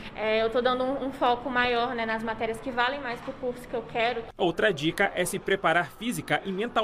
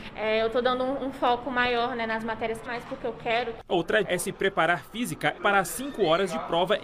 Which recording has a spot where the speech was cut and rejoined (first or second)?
second